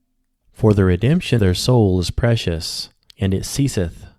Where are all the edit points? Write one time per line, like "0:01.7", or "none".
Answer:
0:01.4
0:03.1